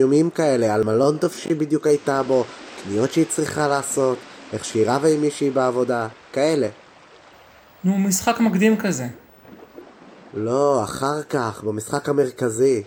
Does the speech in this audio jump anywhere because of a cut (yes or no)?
no